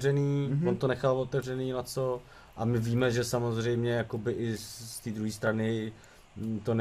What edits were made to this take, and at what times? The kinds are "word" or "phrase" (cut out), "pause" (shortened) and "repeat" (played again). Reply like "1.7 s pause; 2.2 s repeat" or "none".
none

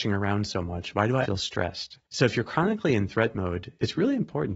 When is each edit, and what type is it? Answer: 1.2 s word; 2.0 s pause

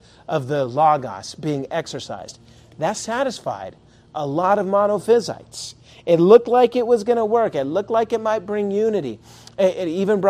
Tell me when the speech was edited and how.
none

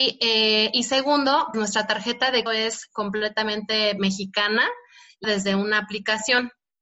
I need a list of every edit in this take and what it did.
1.5 s word; 2.5 s word; 5.2 s word

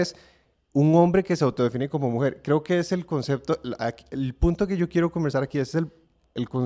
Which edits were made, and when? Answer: none

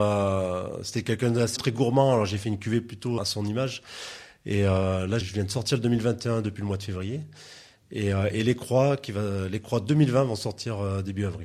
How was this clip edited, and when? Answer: 1.6 s word; 3.2 s word; 5.2 s word

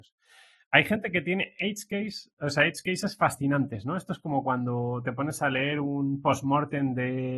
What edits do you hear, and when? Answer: none

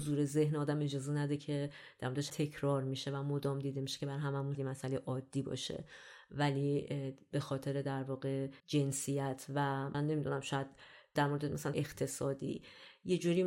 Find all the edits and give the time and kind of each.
2.3 s word; 4.5 s word; 8.6 s pause; 9.9 s word; 11.7 s word

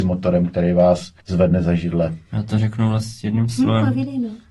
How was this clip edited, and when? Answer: 1.2 s pause

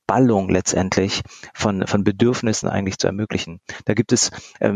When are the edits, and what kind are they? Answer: none

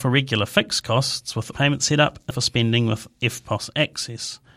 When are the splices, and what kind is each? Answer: 1.5 s word; 2.3 s word

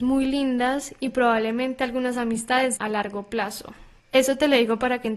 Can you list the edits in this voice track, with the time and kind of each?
2.8 s word

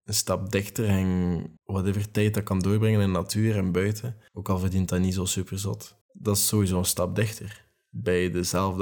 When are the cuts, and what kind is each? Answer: 1.6 s pause; 4.3 s pause; 6.0 s pause

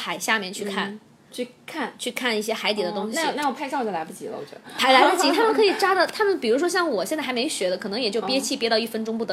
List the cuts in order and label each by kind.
none

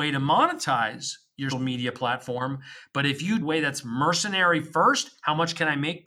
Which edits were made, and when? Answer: 1.5 s word; 3.4 s phrase

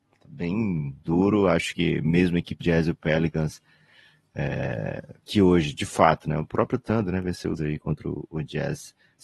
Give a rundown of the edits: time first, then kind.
1.0 s word; 2.6 s phrase; 5.2 s pause; 7.6 s word

